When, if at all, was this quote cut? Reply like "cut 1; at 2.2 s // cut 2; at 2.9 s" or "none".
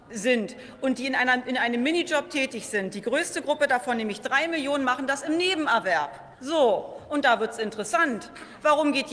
cut 1; at 6.3 s